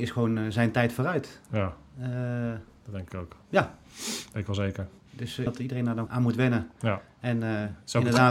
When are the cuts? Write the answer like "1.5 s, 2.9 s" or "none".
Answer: 5.5 s, 6.1 s